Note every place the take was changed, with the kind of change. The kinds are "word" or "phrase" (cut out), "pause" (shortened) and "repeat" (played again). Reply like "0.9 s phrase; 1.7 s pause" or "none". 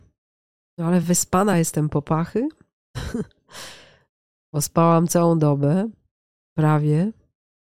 none